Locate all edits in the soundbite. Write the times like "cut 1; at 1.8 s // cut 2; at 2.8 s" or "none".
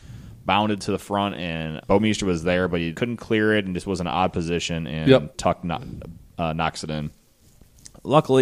cut 1; at 1.8 s // cut 2; at 2.9 s